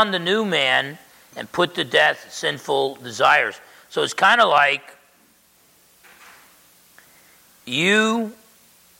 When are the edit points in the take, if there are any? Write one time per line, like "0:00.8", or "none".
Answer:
none